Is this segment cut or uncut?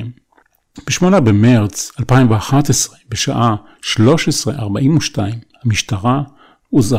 uncut